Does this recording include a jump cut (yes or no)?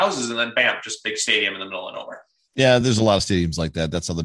no